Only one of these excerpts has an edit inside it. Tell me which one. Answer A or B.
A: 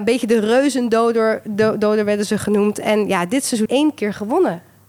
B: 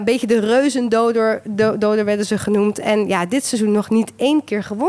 A